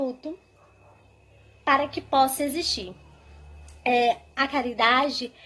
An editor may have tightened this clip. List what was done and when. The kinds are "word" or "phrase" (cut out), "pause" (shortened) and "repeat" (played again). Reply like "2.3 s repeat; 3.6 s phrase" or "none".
none

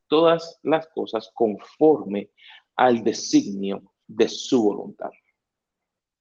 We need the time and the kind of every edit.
4.0 s pause

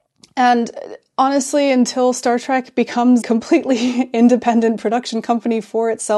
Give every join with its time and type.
3.2 s word

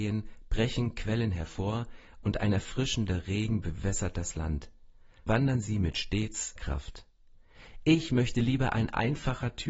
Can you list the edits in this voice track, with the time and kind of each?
5.3 s word; 6.6 s word

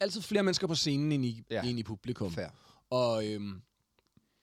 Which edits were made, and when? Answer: none

